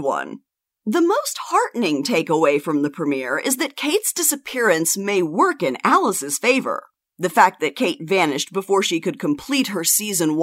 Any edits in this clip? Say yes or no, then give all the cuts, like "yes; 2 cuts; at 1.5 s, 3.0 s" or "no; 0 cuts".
no; 0 cuts